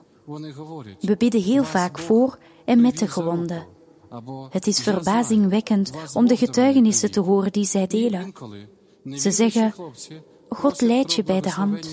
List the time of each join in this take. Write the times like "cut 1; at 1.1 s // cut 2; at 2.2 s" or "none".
none